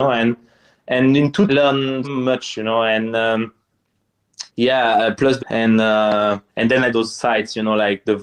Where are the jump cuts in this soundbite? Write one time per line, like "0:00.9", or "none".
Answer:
0:01.5
0:02.0
0:04.5
0:05.4
0:06.5
0:06.9